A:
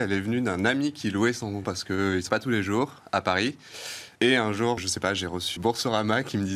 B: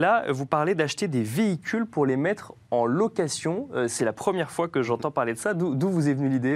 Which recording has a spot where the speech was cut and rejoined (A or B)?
A